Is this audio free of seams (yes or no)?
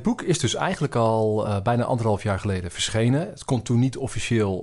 yes